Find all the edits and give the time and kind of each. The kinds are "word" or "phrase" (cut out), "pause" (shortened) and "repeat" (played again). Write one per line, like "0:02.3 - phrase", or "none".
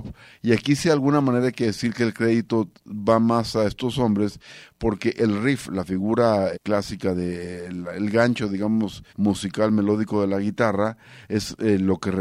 0:06.5 - word
0:09.1 - pause